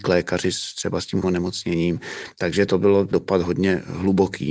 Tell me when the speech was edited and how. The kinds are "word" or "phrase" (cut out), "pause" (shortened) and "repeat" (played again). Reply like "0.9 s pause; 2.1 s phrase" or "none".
1.2 s word; 2.7 s word; 3.1 s word